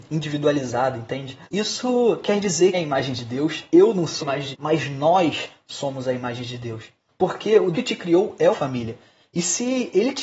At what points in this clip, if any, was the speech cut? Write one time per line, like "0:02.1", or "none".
0:01.4
0:02.7
0:04.2
0:04.5
0:07.1
0:07.7
0:08.5